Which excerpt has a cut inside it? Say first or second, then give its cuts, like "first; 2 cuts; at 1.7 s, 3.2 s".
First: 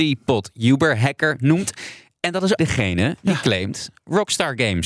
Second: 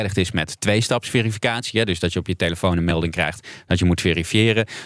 first; 1 cut; at 2.6 s